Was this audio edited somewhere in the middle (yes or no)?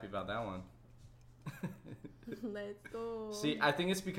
no